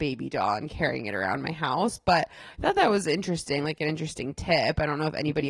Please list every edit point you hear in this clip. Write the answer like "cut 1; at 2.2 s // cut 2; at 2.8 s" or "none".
none